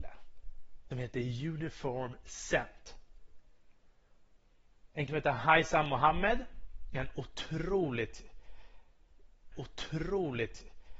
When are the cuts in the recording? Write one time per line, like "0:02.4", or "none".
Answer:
0:00.9
0:05.1
0:09.5